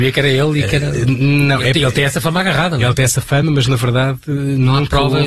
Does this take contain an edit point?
no; 0 cuts

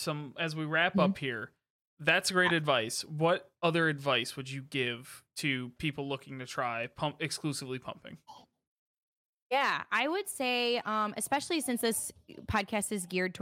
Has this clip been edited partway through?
no; 0 cuts

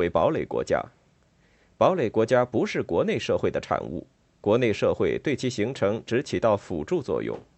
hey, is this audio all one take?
yes; 0 cuts

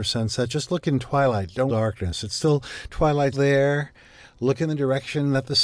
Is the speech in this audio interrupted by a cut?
yes; 2 cuts; at 1.7 s, 3.3 s

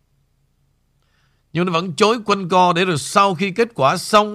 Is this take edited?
no; 0 cuts

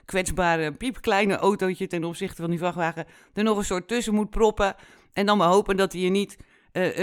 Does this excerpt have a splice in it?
no; 0 cuts

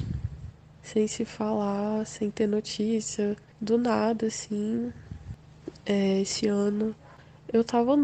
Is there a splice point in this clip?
no; 0 cuts

